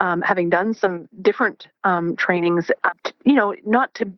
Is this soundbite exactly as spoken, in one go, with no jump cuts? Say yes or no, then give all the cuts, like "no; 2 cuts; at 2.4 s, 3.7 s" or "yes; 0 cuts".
no; 1 cut; at 2.9 s